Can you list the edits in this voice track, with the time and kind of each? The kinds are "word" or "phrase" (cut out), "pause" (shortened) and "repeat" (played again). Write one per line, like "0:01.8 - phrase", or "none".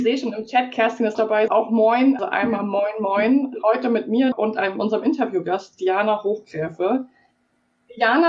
0:01.1 - word
0:01.5 - word
0:02.2 - word
0:04.3 - word